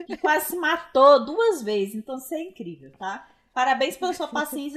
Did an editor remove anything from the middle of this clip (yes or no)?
no